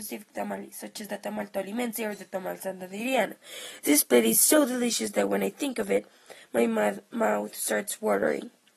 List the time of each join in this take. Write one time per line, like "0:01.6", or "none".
none

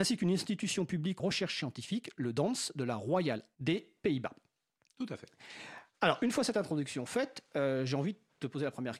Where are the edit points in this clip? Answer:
0:01.2
0:03.6

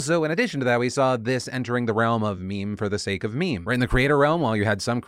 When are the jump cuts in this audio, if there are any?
none

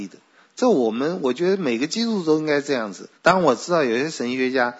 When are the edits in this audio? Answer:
0:03.1

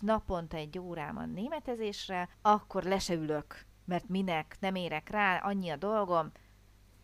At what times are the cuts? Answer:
0:02.3

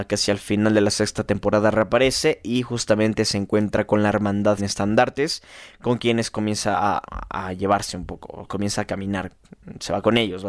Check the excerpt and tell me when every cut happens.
0:04.6
0:07.1

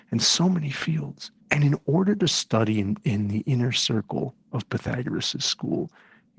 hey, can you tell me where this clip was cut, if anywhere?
0:01.4

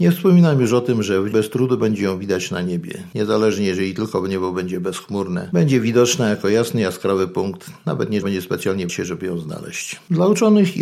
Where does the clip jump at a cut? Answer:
0:01.3
0:08.2
0:08.9

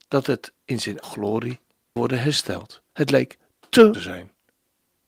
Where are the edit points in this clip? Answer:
0:01.0
0:02.0
0:02.9
0:03.9

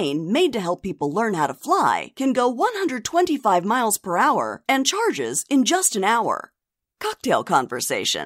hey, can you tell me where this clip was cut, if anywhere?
none

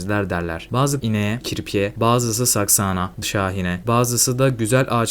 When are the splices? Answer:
0:01.0
0:01.4
0:03.2

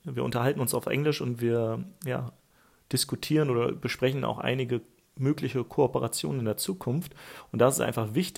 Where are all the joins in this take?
none

